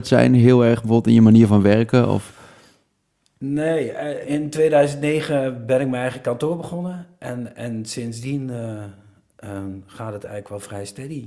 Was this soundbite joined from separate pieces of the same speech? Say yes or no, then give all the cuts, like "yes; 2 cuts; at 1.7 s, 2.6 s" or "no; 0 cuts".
yes; 1 cut; at 4.2 s